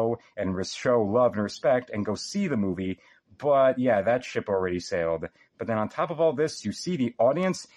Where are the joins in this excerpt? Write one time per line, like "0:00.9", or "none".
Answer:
none